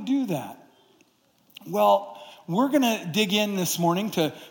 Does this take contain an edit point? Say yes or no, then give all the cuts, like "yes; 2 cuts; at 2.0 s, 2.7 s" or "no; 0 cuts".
no; 0 cuts